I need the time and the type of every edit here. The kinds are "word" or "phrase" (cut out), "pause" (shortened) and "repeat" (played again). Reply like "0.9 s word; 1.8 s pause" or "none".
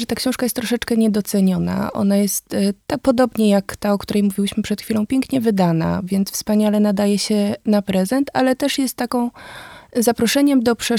none